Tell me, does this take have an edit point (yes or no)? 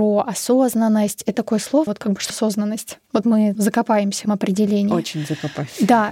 yes